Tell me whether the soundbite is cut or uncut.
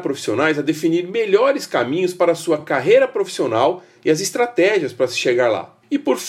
uncut